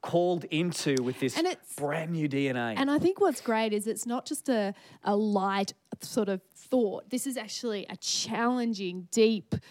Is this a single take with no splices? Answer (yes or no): yes